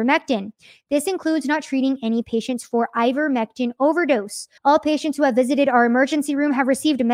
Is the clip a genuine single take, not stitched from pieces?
no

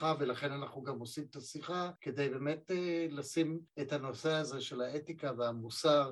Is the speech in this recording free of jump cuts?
no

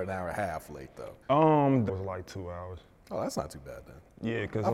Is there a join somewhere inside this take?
yes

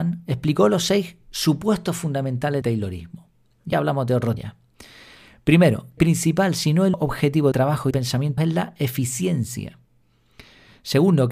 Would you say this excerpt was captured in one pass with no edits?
no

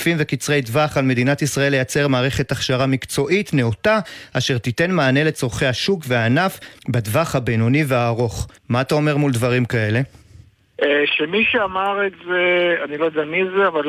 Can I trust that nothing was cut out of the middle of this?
no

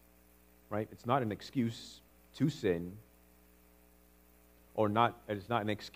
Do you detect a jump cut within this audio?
no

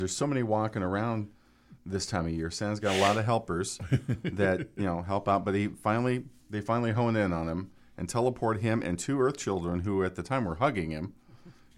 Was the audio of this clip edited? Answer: no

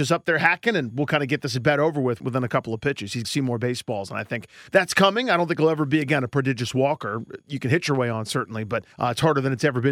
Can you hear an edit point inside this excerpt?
yes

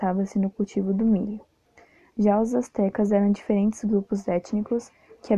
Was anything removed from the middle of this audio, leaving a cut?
no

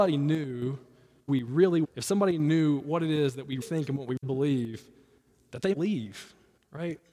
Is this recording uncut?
no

